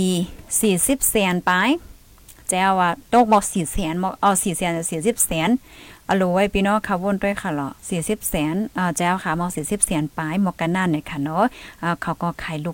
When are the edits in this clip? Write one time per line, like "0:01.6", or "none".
0:03.0
0:07.8